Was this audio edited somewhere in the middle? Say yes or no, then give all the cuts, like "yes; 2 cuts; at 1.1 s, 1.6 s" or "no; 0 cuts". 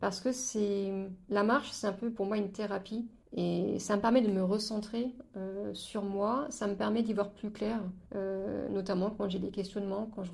yes; 2 cuts; at 3.2 s, 8.1 s